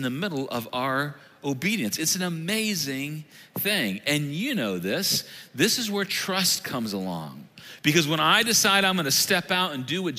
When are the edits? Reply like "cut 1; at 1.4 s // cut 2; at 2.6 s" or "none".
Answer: none